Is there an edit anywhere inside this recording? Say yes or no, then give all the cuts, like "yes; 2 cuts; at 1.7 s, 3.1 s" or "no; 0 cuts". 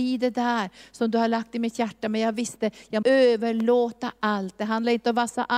yes; 1 cut; at 3.0 s